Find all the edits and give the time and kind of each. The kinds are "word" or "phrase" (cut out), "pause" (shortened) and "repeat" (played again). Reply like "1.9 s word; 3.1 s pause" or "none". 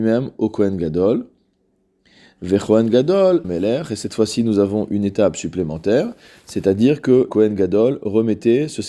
3.4 s phrase; 7.3 s word